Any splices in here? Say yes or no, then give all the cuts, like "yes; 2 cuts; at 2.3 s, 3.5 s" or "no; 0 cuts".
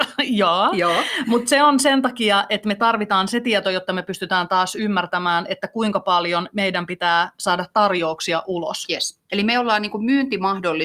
no; 0 cuts